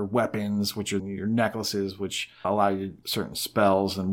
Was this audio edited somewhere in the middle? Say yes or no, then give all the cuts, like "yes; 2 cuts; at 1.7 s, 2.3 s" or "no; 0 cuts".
yes; 3 cuts; at 1.0 s, 2.4 s, 3.0 s